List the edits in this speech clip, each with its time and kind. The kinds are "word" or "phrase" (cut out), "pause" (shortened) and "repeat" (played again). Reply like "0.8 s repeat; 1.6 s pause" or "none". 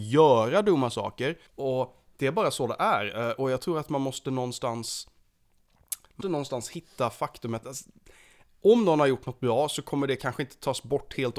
1.5 s pause; 6.2 s word; 7.6 s word